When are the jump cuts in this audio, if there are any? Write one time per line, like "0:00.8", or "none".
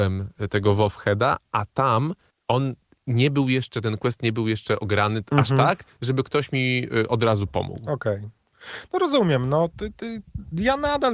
0:02.3